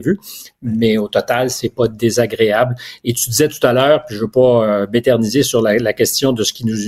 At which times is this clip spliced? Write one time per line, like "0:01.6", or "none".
none